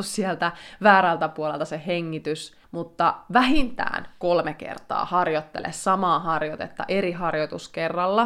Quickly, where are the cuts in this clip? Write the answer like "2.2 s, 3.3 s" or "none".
2.6 s